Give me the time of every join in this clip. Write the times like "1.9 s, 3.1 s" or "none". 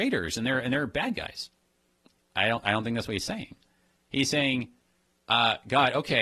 none